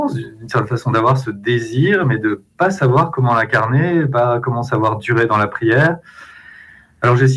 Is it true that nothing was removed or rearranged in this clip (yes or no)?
yes